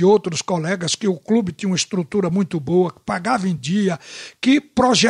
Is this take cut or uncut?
uncut